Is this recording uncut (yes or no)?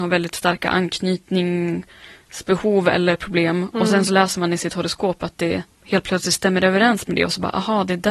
yes